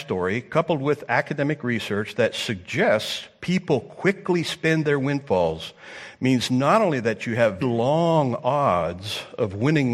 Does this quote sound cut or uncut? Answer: cut